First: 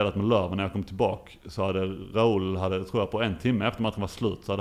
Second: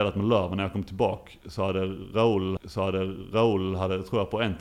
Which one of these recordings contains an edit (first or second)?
second